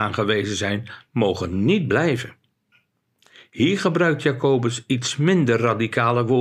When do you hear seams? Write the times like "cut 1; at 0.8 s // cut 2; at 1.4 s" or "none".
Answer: none